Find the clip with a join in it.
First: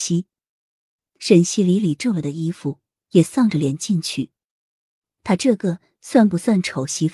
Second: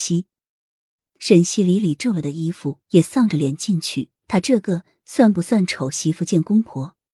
second; 2 cuts; at 2.8 s, 4.2 s

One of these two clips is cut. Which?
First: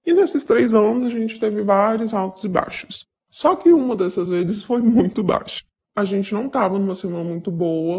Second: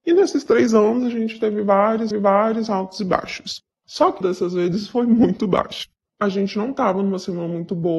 second; 2 cuts; at 2.1 s, 4.2 s

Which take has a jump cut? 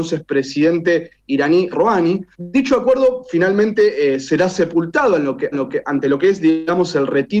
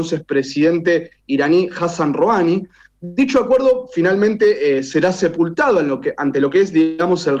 first; 3 cuts; at 1.7 s, 2.3 s, 5.5 s

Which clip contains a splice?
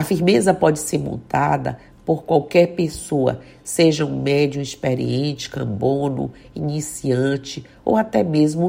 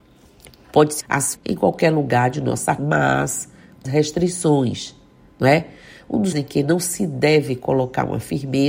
second; 5 cuts; at 1.0 s, 1.3 s, 2.8 s, 3.8 s, 6.3 s

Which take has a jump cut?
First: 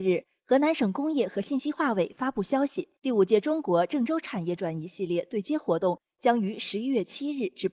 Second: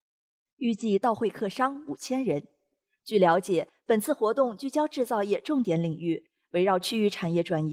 first; 1 cut; at 3.0 s

